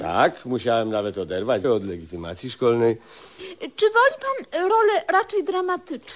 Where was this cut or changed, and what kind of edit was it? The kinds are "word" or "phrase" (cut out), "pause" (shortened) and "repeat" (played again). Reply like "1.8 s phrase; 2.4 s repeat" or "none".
1.6 s word